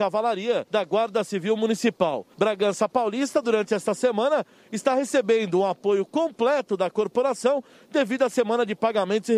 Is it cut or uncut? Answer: uncut